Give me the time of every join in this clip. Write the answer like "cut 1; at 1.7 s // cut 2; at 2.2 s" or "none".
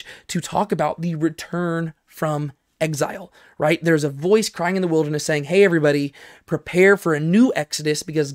none